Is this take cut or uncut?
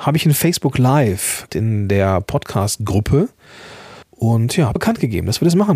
cut